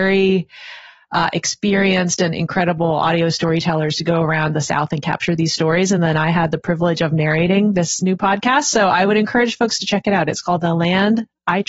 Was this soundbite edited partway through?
no; 0 cuts

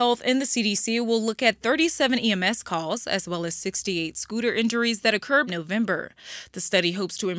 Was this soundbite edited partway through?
yes; 1 cut; at 5.5 s

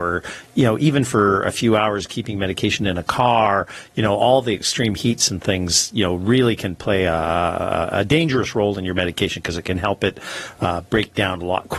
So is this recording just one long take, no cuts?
yes; 0 cuts

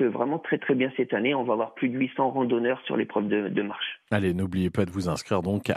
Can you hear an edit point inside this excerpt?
no; 0 cuts

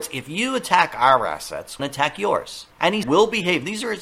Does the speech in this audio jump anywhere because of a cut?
yes; 3 cuts; at 1.8 s, 2.7 s, 3.0 s

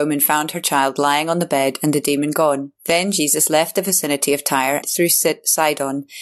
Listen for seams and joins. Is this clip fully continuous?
no; 2 cuts; at 2.8 s, 4.8 s

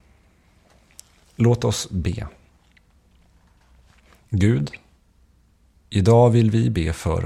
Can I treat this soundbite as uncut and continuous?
yes; 0 cuts

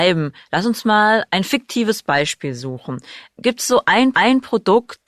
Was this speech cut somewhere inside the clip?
yes; 1 cut; at 4.1 s

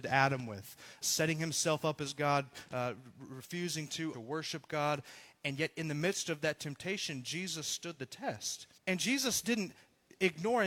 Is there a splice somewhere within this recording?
yes; 3 cuts; at 1.0 s, 4.1 s, 8.8 s

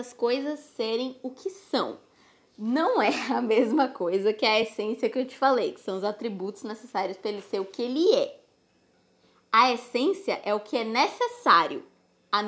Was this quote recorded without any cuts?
yes; 0 cuts

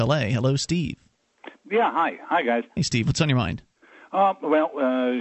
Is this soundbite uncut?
yes; 0 cuts

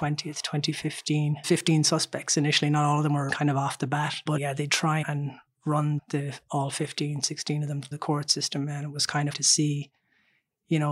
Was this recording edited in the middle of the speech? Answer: yes; 8 cuts; at 1.4 s, 3.3 s, 4.4 s, 4.7 s, 5.0 s, 6.0 s, 7.9 s, 9.3 s

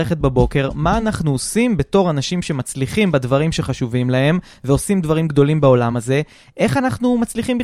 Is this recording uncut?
yes; 0 cuts

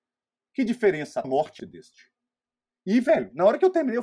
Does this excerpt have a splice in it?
yes; 2 cuts; at 1.2 s, 1.6 s

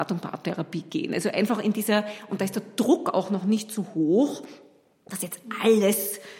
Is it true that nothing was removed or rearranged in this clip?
yes; 0 cuts

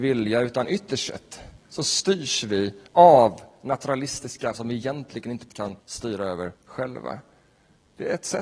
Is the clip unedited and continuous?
no; 6 cuts; at 1.6 s, 2.9 s, 4.5 s, 5.5 s, 5.8 s, 6.5 s

